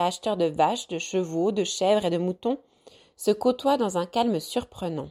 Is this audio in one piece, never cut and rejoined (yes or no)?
yes